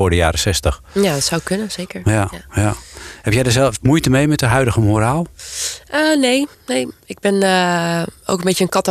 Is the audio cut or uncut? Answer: cut